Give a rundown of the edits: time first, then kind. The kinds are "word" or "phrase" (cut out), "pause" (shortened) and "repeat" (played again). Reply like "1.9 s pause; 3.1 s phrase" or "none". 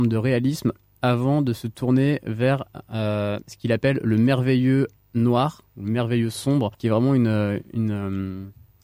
6.7 s pause